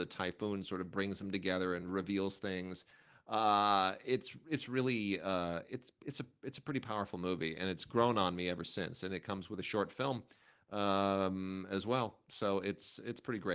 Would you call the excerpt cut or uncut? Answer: uncut